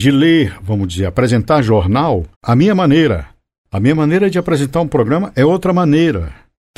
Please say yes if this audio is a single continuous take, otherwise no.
no